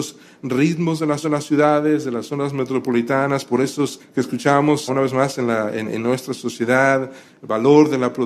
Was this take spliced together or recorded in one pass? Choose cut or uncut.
cut